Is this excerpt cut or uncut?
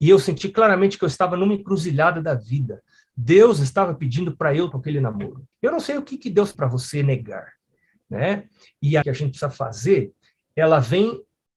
cut